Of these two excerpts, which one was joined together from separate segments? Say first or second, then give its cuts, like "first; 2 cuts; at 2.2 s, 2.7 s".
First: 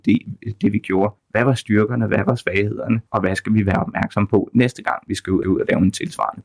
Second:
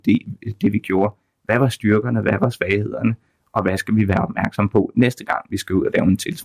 first; 3 cuts; at 1.2 s, 3.1 s, 5.4 s